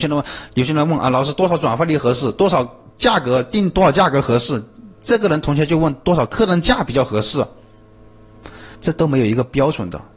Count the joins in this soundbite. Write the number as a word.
two